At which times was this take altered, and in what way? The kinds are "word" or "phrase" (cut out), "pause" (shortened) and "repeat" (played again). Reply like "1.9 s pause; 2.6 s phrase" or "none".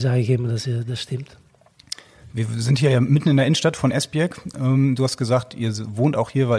none